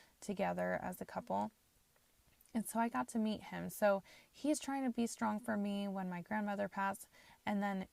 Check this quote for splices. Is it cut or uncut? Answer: uncut